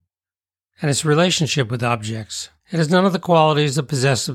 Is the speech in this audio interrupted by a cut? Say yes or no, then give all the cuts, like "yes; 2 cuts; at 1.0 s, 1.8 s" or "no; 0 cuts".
yes; 1 cut; at 2.6 s